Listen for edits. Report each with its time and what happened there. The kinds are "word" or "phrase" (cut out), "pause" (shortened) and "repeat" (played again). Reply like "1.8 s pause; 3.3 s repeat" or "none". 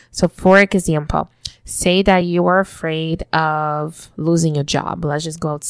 none